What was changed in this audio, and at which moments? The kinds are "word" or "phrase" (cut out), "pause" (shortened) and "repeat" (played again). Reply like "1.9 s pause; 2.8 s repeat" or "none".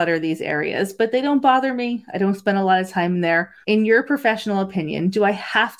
3.6 s pause